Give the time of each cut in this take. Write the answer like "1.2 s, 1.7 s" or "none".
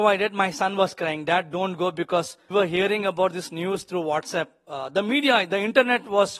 2.5 s

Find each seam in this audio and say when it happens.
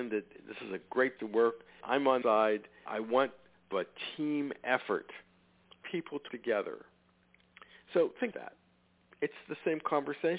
1.2 s, 1.8 s, 2.2 s, 2.8 s, 3.7 s, 5.8 s, 6.3 s, 8.3 s

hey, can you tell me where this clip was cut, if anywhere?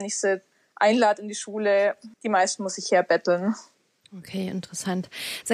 2.1 s, 3.7 s

